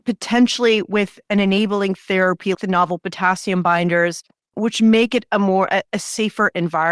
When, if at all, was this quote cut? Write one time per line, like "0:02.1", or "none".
0:02.5
0:04.5